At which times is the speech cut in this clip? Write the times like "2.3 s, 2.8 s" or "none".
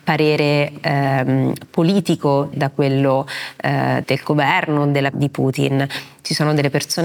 2.5 s, 4.0 s, 5.1 s